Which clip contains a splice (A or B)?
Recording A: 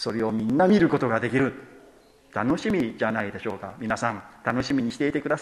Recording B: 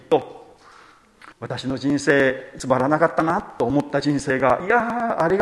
B